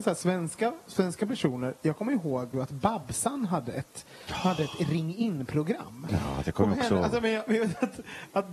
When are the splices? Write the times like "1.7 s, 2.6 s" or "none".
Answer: 2.5 s